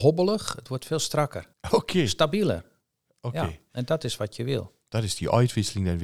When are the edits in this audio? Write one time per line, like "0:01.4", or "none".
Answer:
0:01.5